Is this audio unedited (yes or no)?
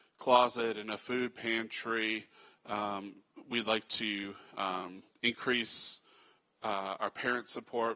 yes